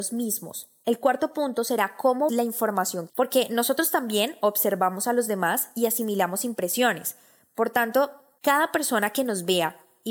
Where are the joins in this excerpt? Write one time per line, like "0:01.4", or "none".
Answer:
0:02.3
0:03.1